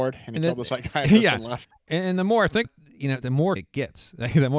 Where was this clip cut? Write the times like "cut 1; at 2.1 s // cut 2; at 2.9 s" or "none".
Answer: cut 1; at 2.6 s // cut 2; at 3.2 s // cut 3; at 3.6 s